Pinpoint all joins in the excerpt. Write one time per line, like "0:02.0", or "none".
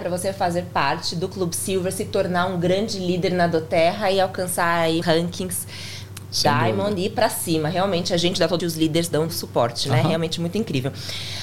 0:05.0
0:08.6
0:09.3